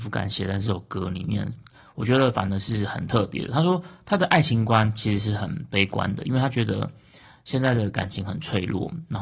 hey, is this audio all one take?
yes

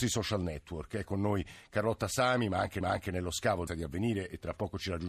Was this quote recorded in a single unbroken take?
no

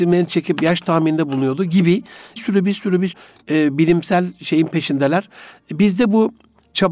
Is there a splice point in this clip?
yes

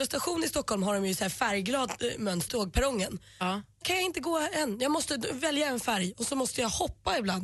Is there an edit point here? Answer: yes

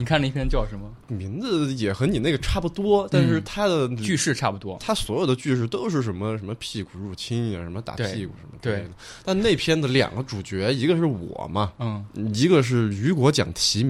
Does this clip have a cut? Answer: yes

